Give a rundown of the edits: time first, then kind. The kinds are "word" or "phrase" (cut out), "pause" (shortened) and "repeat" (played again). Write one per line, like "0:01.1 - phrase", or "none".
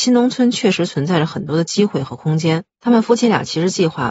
0:02.7 - pause